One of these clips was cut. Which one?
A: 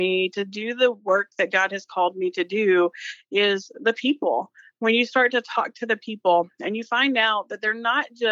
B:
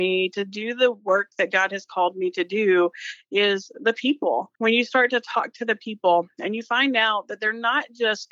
B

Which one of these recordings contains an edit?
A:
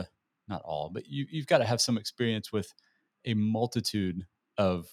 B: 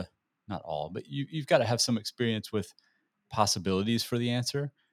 B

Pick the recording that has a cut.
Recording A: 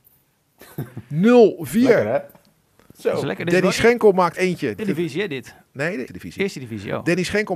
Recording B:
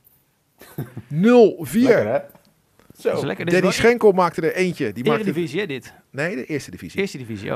A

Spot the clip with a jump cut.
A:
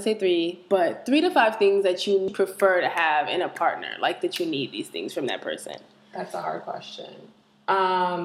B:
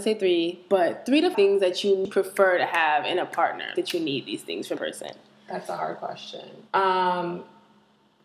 B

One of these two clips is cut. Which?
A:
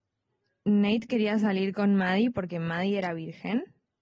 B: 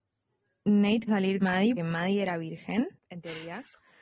B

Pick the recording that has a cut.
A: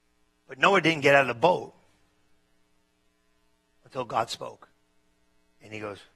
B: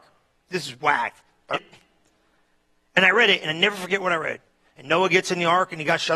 B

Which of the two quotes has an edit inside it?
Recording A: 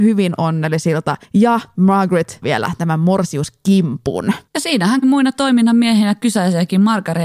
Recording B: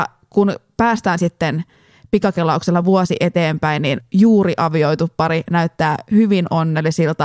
A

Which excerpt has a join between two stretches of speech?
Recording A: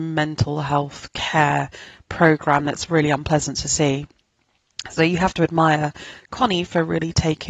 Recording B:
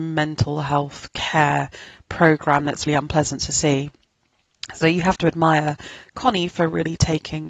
B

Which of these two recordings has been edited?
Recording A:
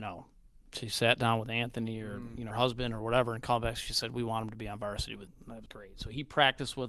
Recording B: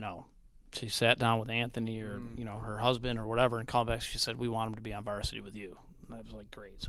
A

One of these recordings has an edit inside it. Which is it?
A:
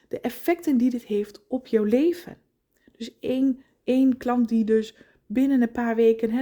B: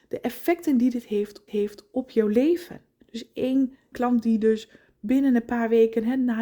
B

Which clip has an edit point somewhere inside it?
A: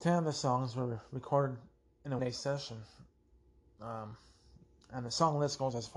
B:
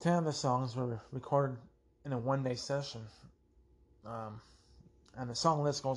A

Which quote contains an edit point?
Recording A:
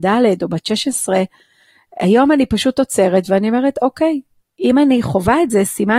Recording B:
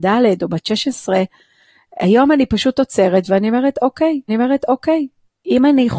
B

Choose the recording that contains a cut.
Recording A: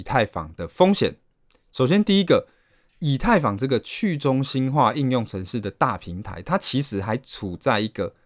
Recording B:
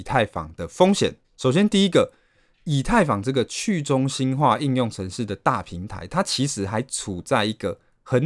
B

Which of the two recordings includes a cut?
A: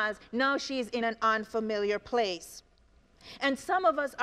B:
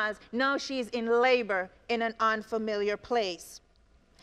A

